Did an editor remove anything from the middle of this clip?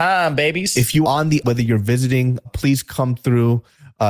yes; 3 cuts; at 1.0 s, 1.4 s, 2.4 s

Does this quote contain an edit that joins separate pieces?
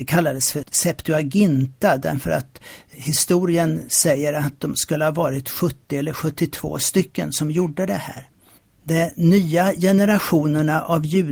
no; 0 cuts

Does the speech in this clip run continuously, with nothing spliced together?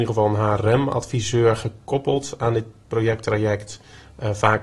yes; 0 cuts

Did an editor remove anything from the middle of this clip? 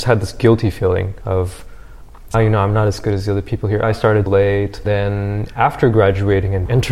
yes; 3 cuts; at 2.3 s, 3.8 s, 4.3 s

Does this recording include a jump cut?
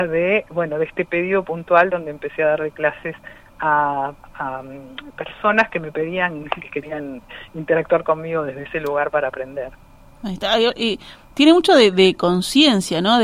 no; 0 cuts

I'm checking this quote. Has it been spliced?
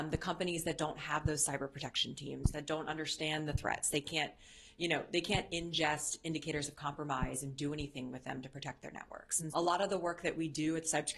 yes; 1 cut; at 9.5 s

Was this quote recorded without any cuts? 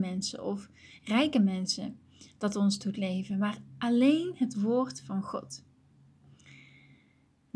yes; 0 cuts

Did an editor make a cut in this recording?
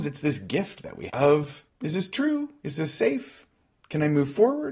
yes; 2 cuts; at 1.1 s, 1.7 s

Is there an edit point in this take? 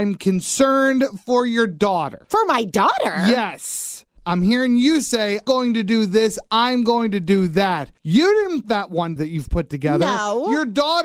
yes; 5 cuts; at 2.2 s, 5.5 s, 8.0 s, 8.6 s, 9.2 s

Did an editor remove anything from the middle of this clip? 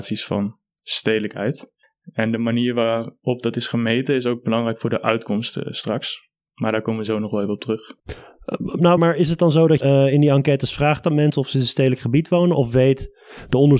yes; 4 cuts; at 1.8 s, 8.0 s, 9.0 s, 9.8 s

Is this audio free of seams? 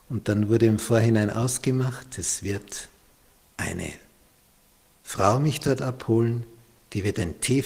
yes; 0 cuts

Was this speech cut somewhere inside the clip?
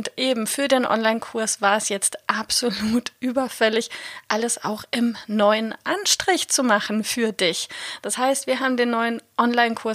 no; 0 cuts

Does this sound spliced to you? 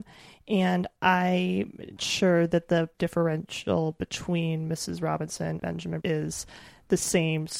yes; 4 cuts; at 2.0 s, 2.9 s, 5.6 s, 6.0 s

